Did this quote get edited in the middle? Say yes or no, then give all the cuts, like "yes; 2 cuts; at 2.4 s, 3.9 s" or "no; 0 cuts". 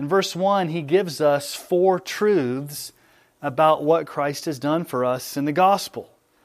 no; 0 cuts